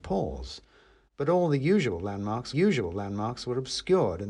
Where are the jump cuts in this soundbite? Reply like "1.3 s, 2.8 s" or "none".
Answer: 2.5 s